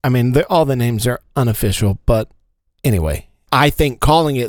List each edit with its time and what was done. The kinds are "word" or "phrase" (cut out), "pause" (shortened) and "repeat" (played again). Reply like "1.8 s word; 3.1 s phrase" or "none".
none